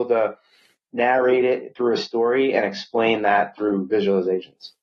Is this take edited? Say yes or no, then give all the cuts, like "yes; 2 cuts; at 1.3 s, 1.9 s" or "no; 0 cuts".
no; 0 cuts